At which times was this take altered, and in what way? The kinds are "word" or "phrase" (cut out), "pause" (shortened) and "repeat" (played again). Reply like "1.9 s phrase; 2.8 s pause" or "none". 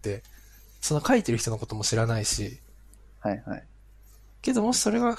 none